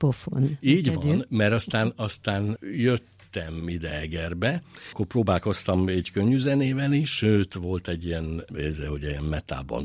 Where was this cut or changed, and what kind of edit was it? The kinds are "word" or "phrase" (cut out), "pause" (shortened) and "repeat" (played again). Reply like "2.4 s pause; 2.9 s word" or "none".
none